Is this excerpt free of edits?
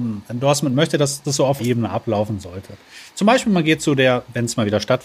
no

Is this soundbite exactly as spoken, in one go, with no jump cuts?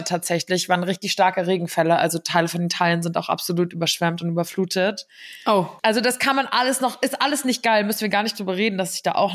no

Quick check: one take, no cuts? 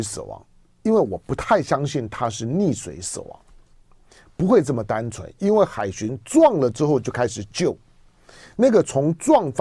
yes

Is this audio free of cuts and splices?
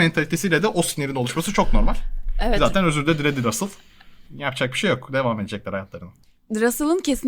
no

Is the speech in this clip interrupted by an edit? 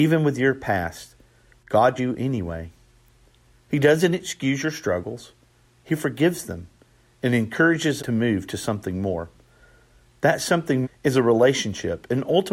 yes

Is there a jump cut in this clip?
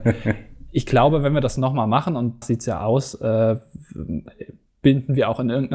yes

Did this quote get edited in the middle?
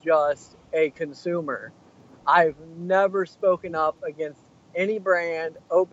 no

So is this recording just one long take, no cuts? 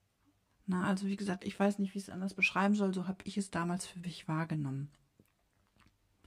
no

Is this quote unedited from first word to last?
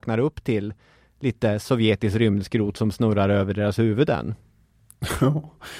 yes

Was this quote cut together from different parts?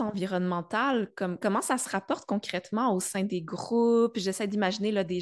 no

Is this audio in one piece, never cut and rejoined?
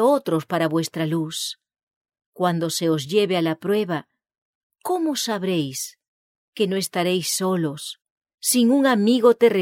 yes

